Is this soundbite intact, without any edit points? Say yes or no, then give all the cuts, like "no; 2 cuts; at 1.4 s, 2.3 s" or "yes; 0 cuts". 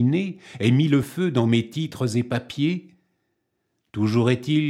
yes; 0 cuts